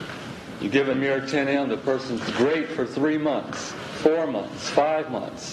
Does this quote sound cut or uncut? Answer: cut